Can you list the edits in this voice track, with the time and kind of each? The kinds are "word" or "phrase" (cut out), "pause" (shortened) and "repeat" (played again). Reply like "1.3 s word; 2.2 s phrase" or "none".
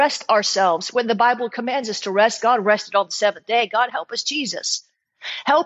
none